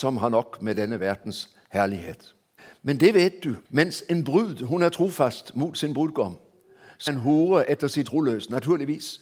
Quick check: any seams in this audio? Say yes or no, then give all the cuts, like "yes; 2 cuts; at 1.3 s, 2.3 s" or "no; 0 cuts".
yes; 4 cuts; at 2.6 s, 3.6 s, 7.1 s, 8.0 s